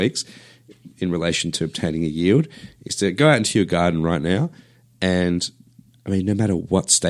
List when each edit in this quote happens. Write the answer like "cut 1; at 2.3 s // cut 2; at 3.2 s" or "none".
none